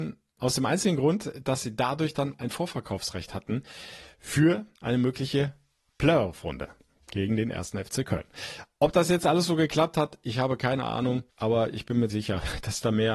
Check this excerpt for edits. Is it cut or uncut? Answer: cut